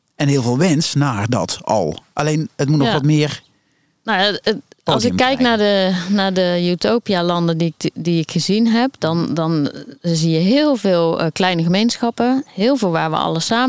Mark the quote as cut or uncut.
uncut